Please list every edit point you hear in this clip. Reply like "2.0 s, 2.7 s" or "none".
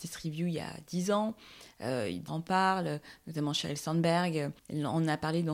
2.3 s